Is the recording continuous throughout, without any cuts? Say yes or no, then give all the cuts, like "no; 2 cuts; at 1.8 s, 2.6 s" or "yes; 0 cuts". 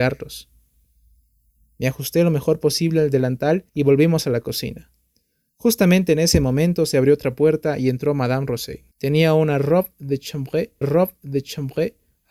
no; 3 cuts; at 3.7 s, 8.9 s, 10.8 s